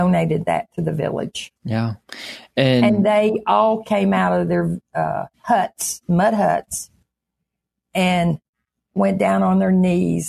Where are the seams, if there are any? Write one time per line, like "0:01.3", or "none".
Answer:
0:01.6
0:05.3